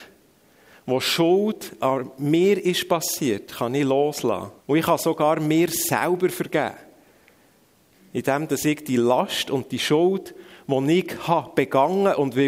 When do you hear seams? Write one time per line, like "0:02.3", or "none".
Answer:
0:04.6